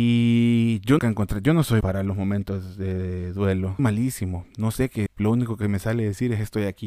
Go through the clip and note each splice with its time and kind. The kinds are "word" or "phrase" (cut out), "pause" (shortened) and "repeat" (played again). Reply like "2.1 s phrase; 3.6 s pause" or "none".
1.0 s word; 1.8 s word; 3.8 s word; 5.1 s word